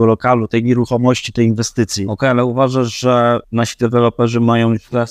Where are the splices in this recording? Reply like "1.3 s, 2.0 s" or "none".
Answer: 3.4 s